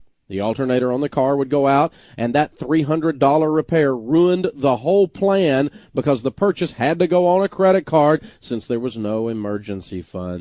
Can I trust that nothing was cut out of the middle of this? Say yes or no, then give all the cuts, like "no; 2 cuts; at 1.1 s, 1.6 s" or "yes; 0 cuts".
yes; 0 cuts